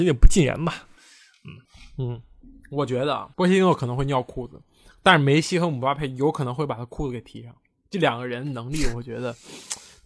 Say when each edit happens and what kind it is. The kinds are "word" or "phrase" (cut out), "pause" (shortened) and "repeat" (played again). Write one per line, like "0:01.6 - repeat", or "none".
0:01.6 - pause
0:02.4 - pause
0:03.3 - pause